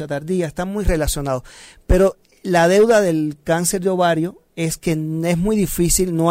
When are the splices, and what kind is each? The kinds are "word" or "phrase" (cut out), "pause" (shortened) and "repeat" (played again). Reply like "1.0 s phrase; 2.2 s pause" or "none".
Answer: none